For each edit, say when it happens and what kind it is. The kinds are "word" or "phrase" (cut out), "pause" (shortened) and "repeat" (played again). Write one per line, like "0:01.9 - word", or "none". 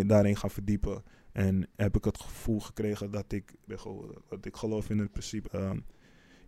0:01.1 - pause
0:03.7 - word
0:04.2 - pause
0:05.4 - word